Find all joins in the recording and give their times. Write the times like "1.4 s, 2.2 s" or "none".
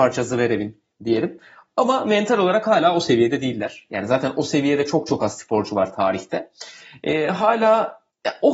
none